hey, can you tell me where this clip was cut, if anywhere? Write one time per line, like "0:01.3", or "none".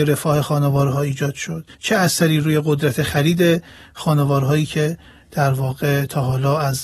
0:01.7